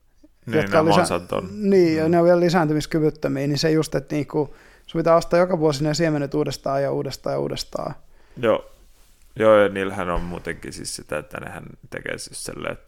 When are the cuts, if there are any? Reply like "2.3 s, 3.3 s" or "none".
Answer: 3.9 s